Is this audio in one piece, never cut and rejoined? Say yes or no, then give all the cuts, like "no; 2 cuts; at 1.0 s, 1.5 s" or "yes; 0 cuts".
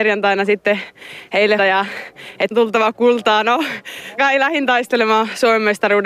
no; 3 cuts; at 1.6 s, 2.5 s, 4.2 s